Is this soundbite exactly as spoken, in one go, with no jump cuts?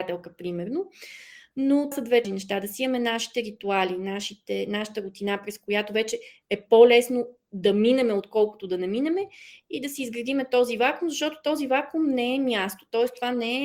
no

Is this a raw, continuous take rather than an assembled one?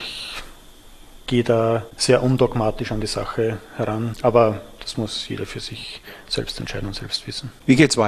yes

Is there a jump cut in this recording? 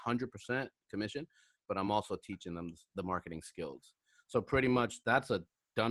no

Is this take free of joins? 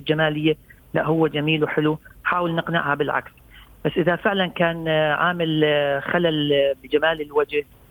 yes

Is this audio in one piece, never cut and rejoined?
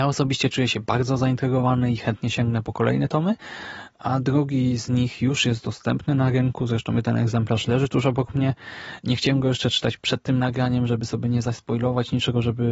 yes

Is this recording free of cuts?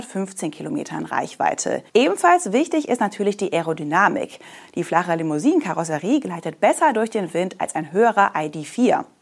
no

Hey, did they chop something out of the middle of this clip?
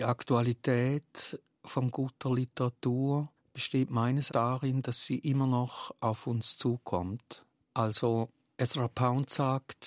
yes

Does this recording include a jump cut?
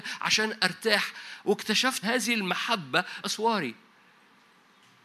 yes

